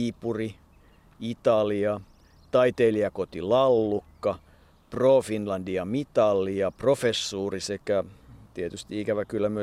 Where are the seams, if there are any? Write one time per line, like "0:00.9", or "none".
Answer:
none